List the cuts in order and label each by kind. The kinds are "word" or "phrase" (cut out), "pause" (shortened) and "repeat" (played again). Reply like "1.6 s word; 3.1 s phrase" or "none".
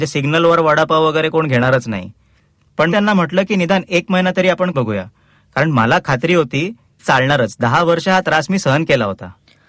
2.9 s word; 4.7 s word; 7.0 s word